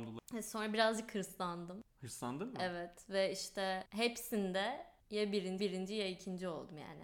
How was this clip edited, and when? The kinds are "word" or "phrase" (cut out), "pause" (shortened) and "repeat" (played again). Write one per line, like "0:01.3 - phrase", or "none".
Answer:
0:05.0 - pause
0:05.6 - repeat